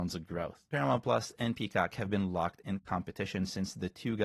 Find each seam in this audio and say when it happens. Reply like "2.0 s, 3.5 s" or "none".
none